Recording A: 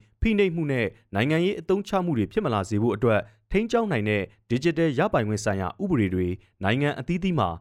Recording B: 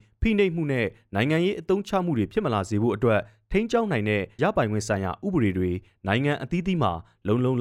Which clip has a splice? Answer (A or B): B